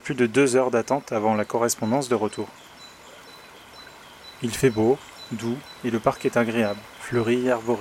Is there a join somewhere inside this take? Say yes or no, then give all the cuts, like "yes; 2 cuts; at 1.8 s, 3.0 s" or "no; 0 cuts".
no; 0 cuts